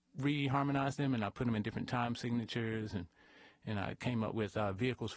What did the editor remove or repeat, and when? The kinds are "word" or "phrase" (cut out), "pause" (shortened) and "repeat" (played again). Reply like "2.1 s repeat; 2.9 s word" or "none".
none